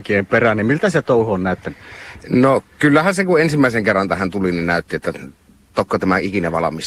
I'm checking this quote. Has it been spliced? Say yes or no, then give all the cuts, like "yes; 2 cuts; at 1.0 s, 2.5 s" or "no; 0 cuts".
no; 0 cuts